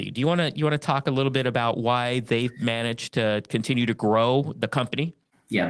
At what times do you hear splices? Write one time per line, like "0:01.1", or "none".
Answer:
none